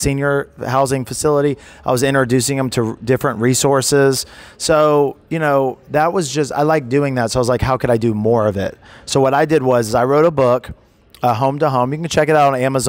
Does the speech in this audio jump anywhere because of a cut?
no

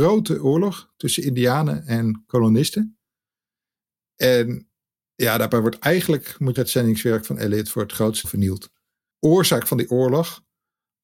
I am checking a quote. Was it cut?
yes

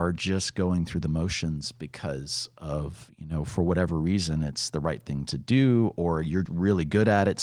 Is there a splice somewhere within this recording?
yes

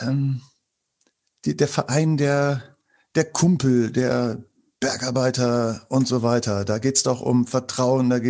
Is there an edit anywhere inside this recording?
no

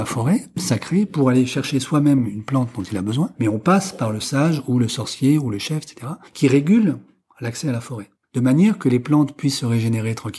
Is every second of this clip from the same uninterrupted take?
no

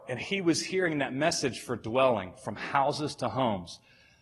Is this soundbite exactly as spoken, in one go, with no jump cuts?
yes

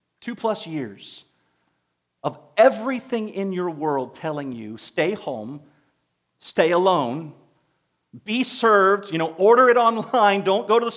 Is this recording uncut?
yes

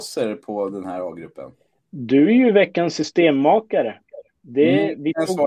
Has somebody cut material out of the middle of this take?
no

